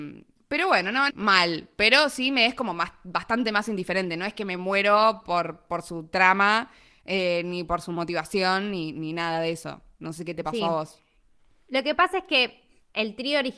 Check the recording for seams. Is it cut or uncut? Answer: cut